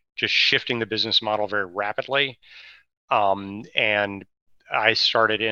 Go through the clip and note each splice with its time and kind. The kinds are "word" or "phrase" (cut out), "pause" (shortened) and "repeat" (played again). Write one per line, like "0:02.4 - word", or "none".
none